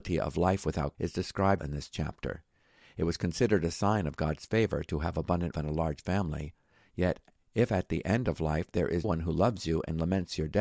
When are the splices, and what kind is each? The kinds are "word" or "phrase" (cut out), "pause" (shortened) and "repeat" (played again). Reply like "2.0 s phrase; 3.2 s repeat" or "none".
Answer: 0.9 s word; 1.6 s word; 5.5 s word; 9.0 s word